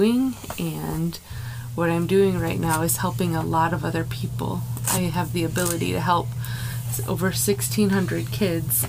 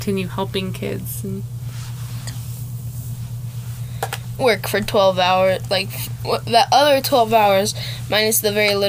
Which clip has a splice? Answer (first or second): second